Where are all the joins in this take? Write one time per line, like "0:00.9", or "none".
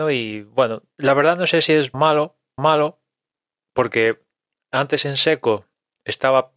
0:01.9
0:02.6